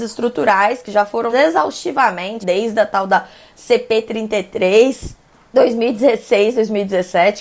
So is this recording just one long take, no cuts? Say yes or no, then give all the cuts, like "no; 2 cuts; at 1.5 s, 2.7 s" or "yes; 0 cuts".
no; 3 cuts; at 1.3 s, 2.4 s, 5.5 s